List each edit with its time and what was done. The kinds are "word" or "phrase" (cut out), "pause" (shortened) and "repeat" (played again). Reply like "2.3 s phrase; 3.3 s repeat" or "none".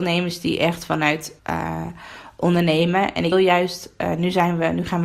1.4 s word; 3.3 s word